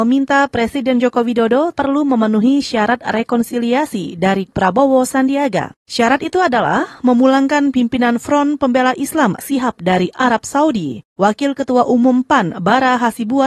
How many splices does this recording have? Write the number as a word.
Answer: three